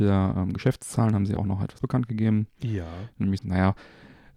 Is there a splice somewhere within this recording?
yes; 3 cuts; at 1.4 s, 1.8 s, 3.4 s

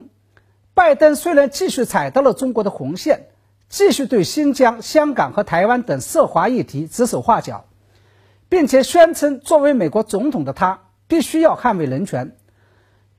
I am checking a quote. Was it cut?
no; 0 cuts

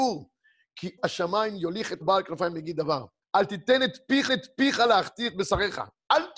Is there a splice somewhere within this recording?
yes; 4 cuts; at 1.0 s, 2.0 s, 3.2 s, 4.3 s

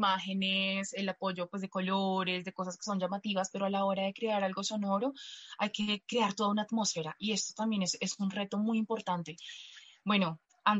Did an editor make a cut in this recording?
no; 0 cuts

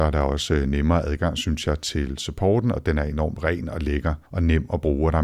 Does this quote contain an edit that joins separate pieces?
yes; 1 cut; at 4.3 s

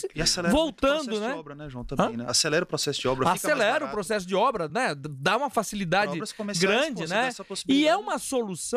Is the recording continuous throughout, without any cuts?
yes; 0 cuts

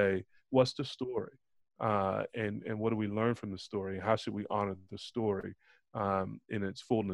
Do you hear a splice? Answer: no; 0 cuts

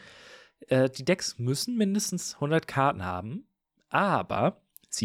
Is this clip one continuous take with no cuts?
yes; 0 cuts

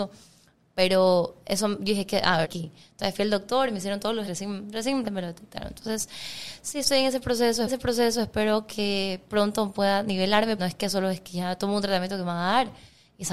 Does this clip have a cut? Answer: yes; 5 cuts; at 2.4 s, 4.3 s, 5.0 s, 7.7 s, 10.6 s

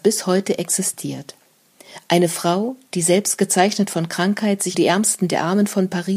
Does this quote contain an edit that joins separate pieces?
yes; 1 cut; at 4.7 s

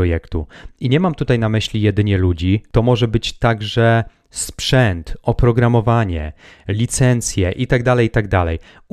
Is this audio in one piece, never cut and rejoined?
yes; 0 cuts

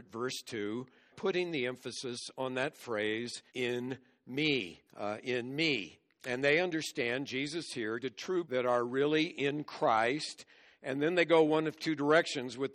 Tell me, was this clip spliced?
yes; 5 cuts; at 1.1 s, 3.5 s, 4.9 s, 8.0 s, 8.4 s

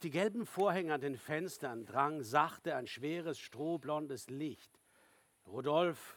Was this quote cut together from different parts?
no; 0 cuts

